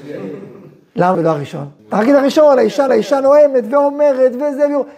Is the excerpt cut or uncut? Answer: cut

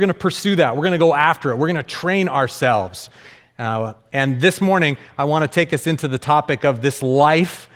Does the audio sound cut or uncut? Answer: uncut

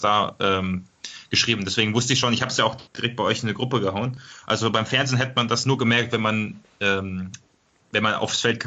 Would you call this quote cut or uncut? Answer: cut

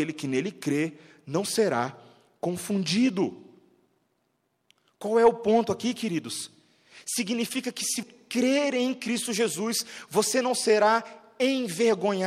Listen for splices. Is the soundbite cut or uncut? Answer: cut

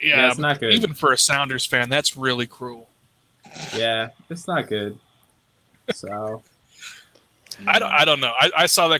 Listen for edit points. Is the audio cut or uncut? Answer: uncut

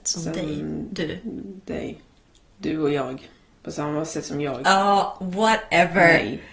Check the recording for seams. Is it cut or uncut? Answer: uncut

